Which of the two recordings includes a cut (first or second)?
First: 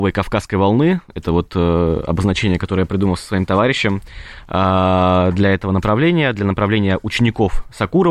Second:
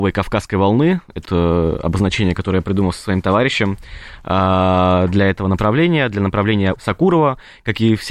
second